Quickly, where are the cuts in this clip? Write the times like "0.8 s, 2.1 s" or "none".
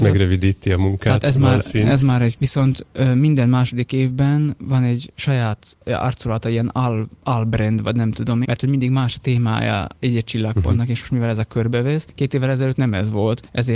1.2 s, 2.4 s, 8.4 s